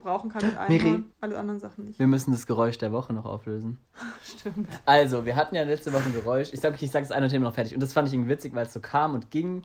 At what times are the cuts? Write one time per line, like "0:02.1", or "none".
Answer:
0:01.1